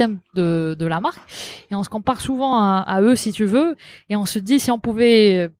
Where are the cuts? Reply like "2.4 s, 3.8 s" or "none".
none